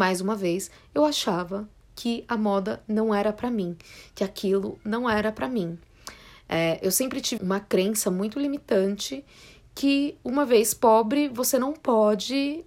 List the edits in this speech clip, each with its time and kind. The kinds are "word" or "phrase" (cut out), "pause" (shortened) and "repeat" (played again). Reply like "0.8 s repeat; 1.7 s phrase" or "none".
7.4 s word